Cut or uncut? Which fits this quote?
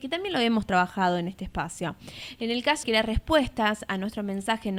cut